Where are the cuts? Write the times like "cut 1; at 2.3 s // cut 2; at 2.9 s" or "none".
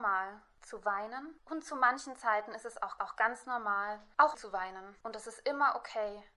cut 1; at 3.0 s // cut 2; at 4.3 s // cut 3; at 5.0 s